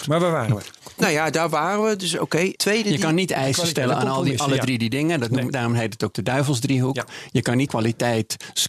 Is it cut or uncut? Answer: cut